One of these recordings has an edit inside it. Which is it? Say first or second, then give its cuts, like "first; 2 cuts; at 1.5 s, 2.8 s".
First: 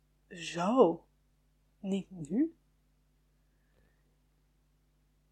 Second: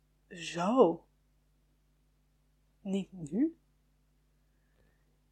first; 1 cut; at 1.3 s